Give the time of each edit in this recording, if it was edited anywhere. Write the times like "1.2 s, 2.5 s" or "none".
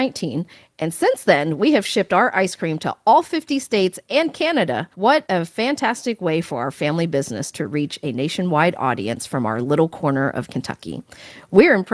4.9 s